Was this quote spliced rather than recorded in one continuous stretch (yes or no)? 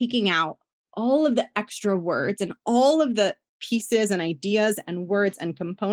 no